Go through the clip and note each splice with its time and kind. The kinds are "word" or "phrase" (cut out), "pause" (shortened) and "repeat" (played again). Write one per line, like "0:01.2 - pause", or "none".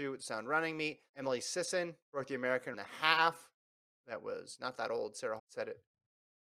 0:01.1 - pause
0:02.7 - word
0:05.4 - word